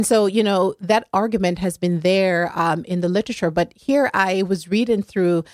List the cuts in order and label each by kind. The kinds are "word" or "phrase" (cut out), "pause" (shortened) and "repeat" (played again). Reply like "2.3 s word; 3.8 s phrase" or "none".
none

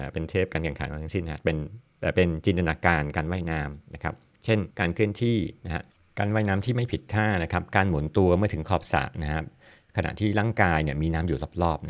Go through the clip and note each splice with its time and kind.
4.2 s pause; 4.7 s pause; 5.6 s pause; 5.9 s pause

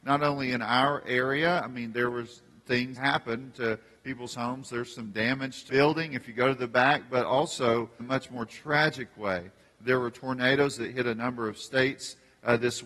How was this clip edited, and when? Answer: 3.0 s word; 5.7 s word; 8.0 s word

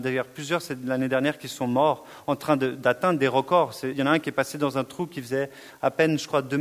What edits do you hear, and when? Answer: 3.9 s word

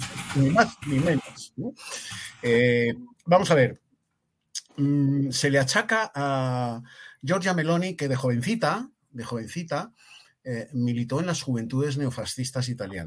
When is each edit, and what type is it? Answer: none

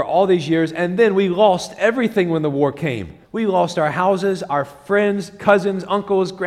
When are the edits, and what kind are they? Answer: 3.2 s pause

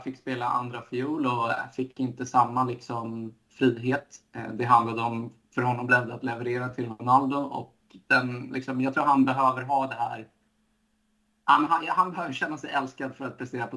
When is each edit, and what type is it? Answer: none

